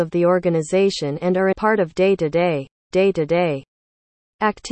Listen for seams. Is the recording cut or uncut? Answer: cut